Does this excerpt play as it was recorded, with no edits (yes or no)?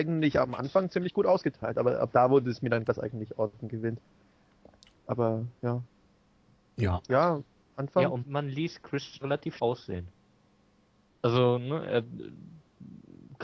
no